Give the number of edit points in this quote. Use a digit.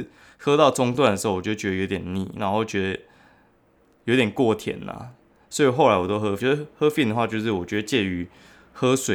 1